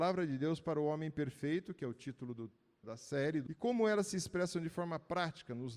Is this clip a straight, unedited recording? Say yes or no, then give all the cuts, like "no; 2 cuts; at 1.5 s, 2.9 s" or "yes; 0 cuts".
no; 2 cuts; at 2.8 s, 3.5 s